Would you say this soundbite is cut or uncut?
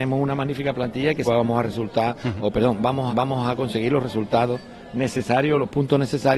cut